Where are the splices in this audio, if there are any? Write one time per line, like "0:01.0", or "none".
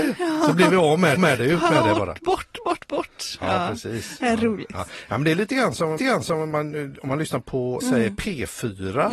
0:01.2
0:06.0
0:07.4
0:07.8